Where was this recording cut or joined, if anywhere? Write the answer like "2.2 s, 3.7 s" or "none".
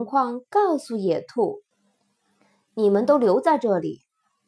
1.7 s